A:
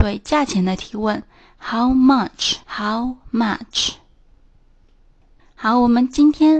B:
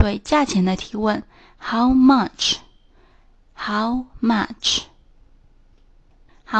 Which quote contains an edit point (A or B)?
A